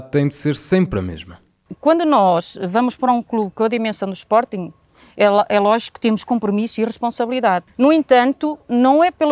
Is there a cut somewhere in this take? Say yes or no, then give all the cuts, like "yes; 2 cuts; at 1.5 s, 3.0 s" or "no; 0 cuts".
no; 0 cuts